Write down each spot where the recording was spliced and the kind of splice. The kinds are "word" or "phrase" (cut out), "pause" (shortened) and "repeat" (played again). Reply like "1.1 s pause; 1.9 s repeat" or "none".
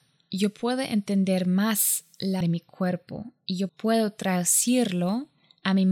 2.4 s word; 3.7 s word

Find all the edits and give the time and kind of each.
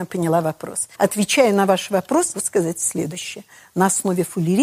0.9 s pause; 2.3 s word

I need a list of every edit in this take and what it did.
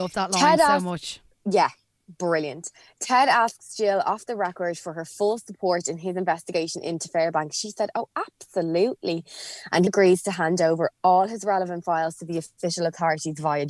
9.9 s word

